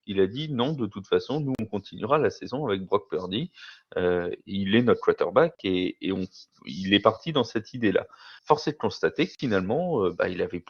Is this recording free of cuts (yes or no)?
no